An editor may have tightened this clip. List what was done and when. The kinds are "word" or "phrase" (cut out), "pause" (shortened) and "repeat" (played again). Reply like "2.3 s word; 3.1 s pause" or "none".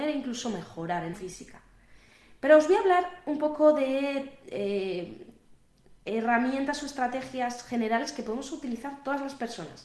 1.1 s phrase